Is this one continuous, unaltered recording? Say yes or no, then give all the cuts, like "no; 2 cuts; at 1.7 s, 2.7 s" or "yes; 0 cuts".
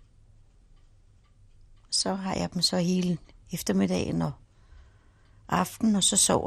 yes; 0 cuts